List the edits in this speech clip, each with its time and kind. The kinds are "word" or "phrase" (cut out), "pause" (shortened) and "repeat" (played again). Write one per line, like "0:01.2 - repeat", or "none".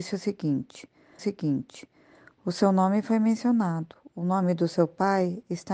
0:01.2 - repeat

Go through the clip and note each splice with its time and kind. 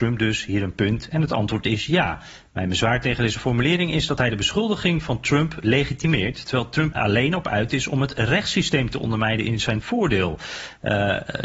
0:06.9 - word

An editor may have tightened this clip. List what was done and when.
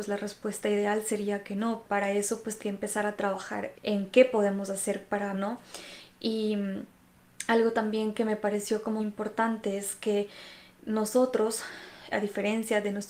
0:01.8 - word
0:02.6 - word
0:03.7 - word
0:05.3 - word
0:09.0 - word
0:12.1 - word

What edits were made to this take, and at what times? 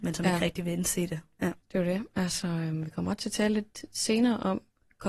0:01.6 - pause

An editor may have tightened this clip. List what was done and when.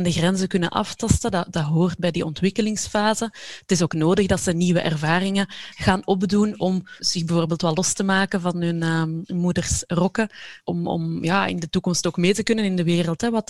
none

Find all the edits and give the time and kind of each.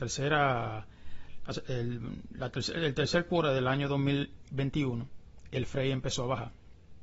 none

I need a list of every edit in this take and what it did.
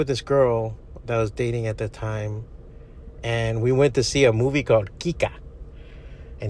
none

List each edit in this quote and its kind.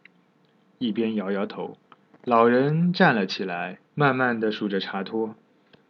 0:01.9 - pause
0:03.9 - pause

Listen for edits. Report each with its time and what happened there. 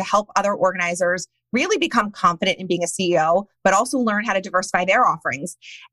none

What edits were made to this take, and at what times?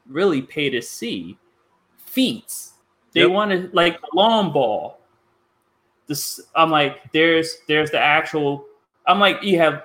0:02.8 - pause

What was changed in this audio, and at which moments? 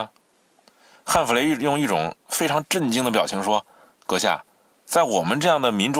0:02.2 - pause

